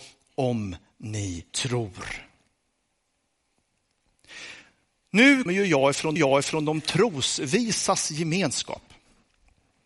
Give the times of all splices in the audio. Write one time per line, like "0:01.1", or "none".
0:01.5
0:05.5
0:06.2